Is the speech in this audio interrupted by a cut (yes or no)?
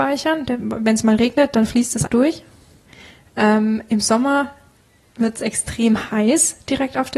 yes